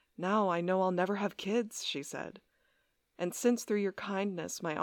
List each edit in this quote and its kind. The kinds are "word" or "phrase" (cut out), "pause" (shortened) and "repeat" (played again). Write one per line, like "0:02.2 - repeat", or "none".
none